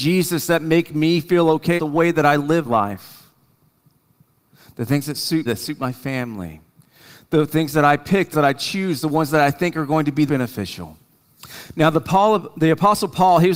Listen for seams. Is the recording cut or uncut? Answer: cut